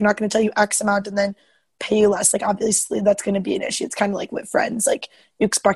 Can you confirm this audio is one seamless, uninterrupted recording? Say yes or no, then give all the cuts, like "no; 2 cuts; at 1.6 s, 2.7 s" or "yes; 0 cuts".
yes; 0 cuts